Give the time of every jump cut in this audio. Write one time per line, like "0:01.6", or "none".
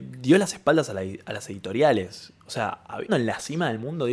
0:03.1